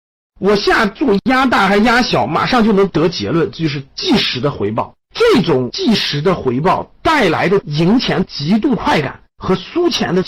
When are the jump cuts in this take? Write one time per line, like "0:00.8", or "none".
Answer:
0:05.0
0:09.3